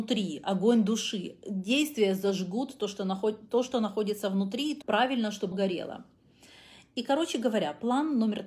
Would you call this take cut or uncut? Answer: cut